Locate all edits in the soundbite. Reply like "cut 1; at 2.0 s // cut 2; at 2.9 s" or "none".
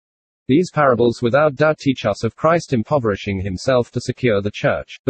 none